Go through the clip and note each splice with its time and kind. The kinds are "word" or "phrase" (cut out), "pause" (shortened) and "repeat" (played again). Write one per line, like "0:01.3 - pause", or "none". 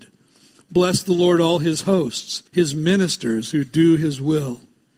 0:02.5 - pause

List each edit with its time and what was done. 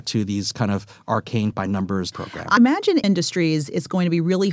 0:01.5 - word
0:02.1 - word
0:02.6 - word
0:03.0 - phrase

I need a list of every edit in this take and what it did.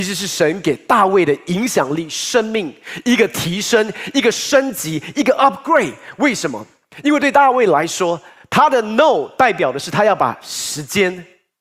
none

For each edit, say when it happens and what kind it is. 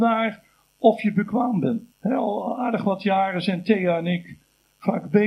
0:01.9 - pause

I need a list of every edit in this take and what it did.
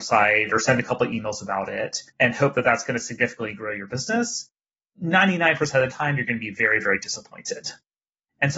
0:02.1 - pause

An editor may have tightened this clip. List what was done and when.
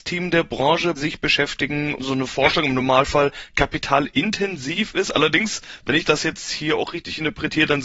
0:01.0 - word
0:02.0 - word

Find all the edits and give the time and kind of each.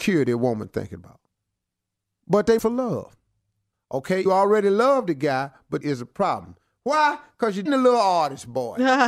0:02.6 - word
0:04.3 - word
0:05.8 - phrase
0:07.7 - word

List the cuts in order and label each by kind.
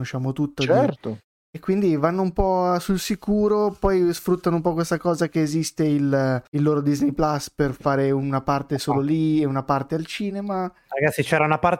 0:06.4 - pause

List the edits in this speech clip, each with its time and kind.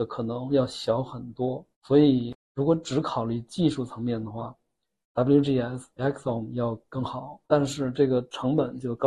0:01.7 - pause
0:06.0 - word
0:07.4 - pause

